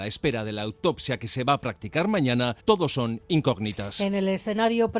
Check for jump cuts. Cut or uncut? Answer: cut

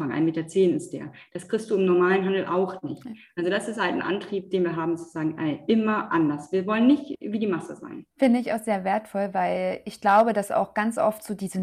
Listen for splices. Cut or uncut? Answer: cut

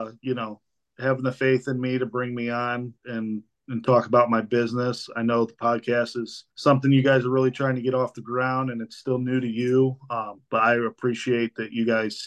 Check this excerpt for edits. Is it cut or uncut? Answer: cut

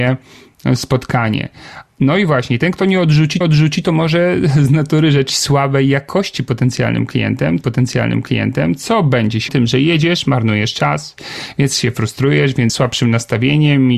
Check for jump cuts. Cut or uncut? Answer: cut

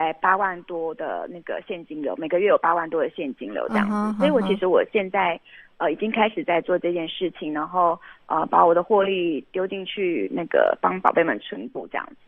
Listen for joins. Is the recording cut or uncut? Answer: uncut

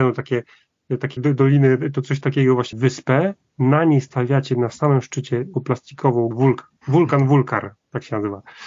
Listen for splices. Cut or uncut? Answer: cut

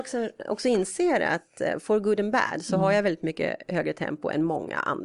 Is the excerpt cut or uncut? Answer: uncut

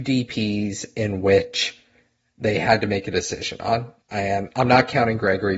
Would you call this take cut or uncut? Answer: uncut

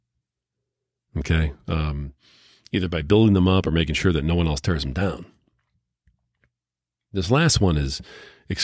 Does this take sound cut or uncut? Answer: uncut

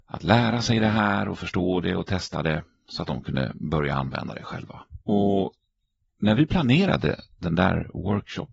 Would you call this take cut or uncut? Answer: cut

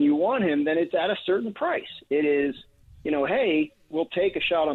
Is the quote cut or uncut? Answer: uncut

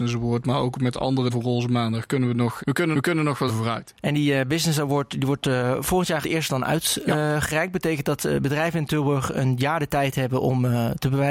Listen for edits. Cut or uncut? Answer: cut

